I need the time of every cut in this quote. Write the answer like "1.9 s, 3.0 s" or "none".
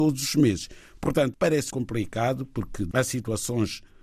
1.3 s, 1.7 s, 2.9 s

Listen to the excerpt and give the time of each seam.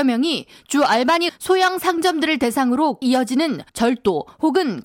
1.3 s, 3.0 s, 3.7 s

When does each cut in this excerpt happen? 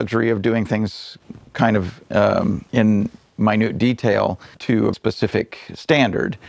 2.7 s, 4.5 s, 4.9 s

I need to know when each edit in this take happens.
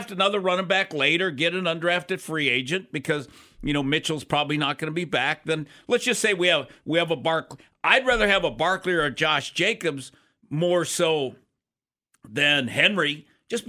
none

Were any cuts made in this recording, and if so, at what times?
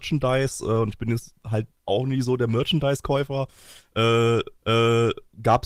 1.4 s, 4.6 s

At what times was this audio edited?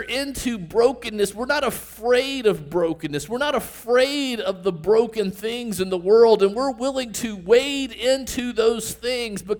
none

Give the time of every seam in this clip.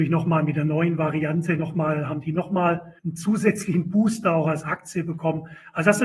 3.0 s

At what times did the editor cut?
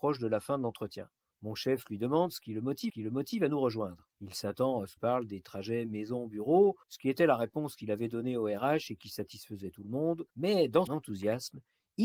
1.3 s, 2.9 s, 4.1 s, 5.0 s, 6.8 s, 10.3 s, 10.9 s

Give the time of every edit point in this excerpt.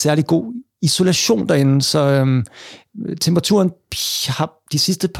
none

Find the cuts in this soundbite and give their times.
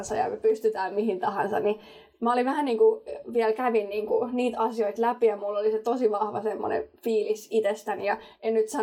none

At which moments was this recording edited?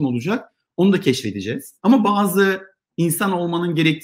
1.8 s

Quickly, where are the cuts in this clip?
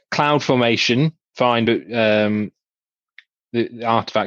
none

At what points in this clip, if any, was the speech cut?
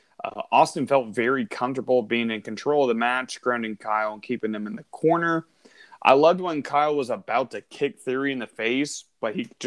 none

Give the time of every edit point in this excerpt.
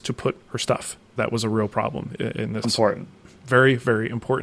1.2 s, 2.6 s

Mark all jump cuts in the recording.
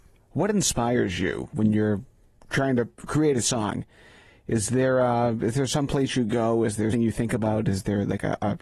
6.9 s

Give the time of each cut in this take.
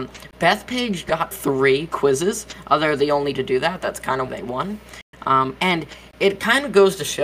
1.3 s, 3.3 s, 4.3 s

